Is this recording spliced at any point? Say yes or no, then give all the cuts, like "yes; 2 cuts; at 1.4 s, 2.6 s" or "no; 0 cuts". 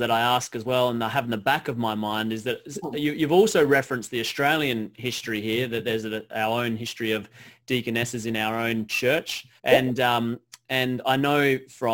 yes; 1 cut; at 9.6 s